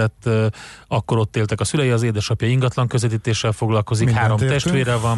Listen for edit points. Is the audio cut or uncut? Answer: uncut